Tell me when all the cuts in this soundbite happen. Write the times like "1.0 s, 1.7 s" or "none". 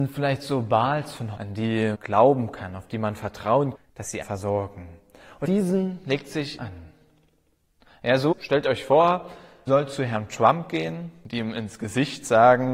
1.4 s, 1.9 s, 3.7 s, 4.2 s, 5.4 s, 6.6 s, 8.3 s, 9.7 s